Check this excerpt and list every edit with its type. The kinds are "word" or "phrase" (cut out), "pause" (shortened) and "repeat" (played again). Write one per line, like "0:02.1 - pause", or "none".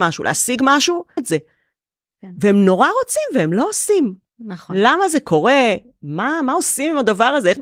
0:01.2 - phrase